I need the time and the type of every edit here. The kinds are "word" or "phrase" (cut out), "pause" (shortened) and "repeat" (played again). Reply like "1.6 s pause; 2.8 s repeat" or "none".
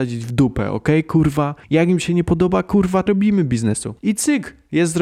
1.6 s pause; 3.1 s word; 4.0 s pause